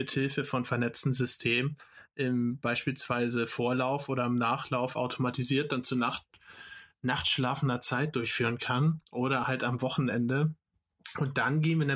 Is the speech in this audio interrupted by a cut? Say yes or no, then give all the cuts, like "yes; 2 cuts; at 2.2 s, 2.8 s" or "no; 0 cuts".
no; 0 cuts